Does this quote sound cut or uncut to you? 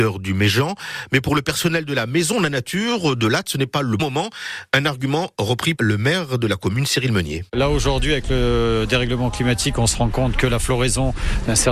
cut